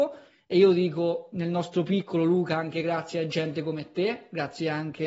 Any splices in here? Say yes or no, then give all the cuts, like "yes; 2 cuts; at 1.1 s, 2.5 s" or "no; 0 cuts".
no; 0 cuts